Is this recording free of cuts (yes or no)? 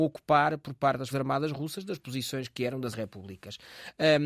no